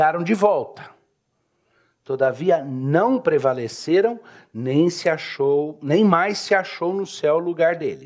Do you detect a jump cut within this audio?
no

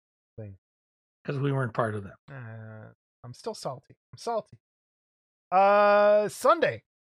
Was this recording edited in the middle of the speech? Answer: yes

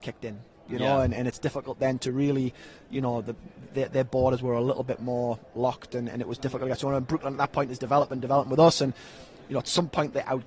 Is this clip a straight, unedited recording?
yes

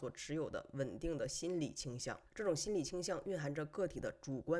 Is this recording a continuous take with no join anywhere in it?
no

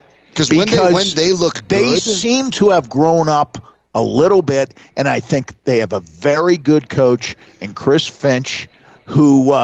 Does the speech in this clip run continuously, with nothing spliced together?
yes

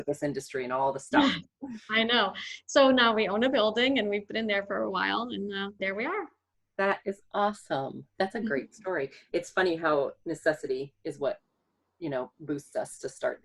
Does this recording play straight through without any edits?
no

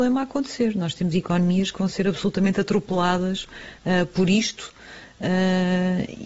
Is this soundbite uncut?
yes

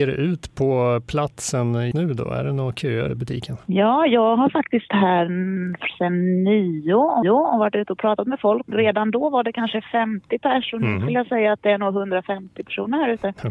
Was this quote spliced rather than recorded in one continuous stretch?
yes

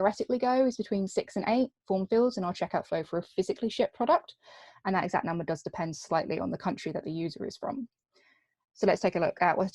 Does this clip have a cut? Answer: no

